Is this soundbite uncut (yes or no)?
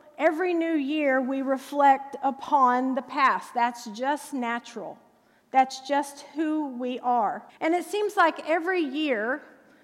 no